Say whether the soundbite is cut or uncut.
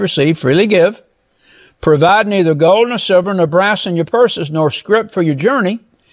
uncut